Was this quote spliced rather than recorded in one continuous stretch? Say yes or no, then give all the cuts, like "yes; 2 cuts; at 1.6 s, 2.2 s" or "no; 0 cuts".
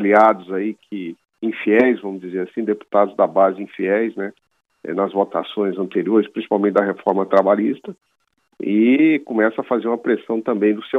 no; 0 cuts